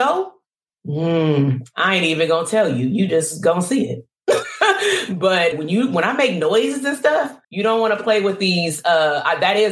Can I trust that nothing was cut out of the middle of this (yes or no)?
no